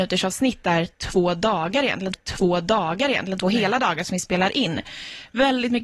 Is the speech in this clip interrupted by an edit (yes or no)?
yes